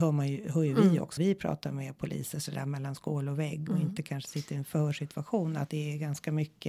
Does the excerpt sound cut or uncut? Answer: cut